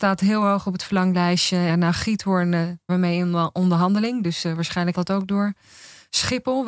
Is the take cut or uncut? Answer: cut